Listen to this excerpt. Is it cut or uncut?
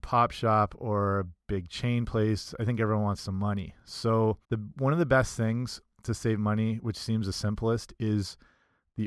cut